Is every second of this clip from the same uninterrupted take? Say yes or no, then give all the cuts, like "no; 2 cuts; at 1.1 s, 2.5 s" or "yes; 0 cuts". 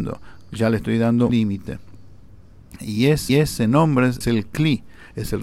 no; 3 cuts; at 1.3 s, 3.3 s, 4.2 s